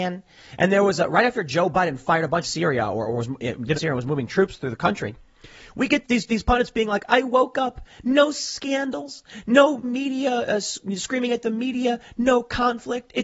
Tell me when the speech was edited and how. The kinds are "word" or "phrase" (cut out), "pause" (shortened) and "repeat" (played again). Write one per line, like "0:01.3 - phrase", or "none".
0:02.4 - phrase
0:03.7 - phrase
0:06.0 - word
0:09.8 - word